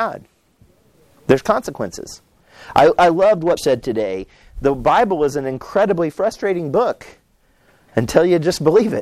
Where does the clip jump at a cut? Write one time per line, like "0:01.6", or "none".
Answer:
0:03.6